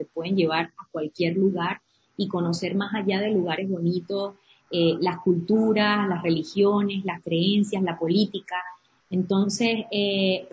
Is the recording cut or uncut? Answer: uncut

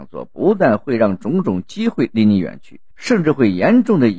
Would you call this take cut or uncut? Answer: cut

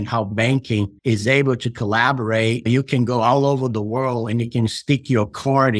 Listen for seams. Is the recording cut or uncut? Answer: cut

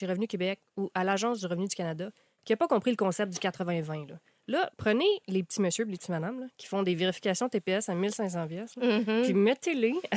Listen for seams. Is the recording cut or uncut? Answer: uncut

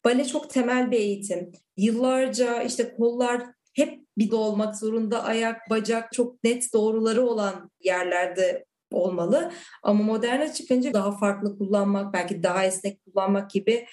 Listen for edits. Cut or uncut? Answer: cut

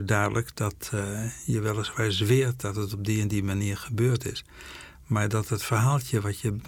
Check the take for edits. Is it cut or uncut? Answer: uncut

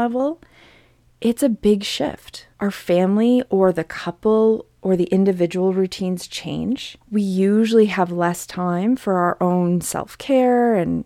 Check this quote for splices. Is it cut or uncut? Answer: cut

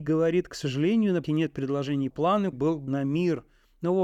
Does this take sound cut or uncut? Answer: cut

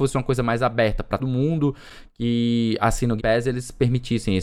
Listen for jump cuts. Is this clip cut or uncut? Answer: cut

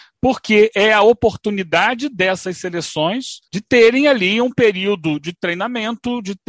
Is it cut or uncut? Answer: cut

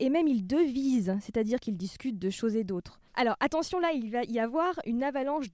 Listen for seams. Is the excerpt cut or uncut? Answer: cut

